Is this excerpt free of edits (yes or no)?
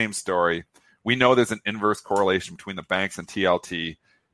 yes